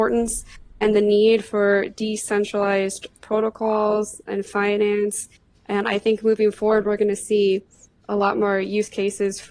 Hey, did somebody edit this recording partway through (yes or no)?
no